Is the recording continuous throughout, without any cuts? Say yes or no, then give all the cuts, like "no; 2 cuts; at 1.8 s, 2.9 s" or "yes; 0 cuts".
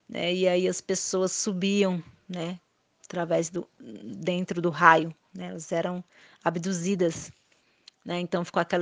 yes; 0 cuts